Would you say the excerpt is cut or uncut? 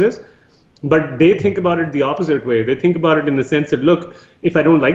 uncut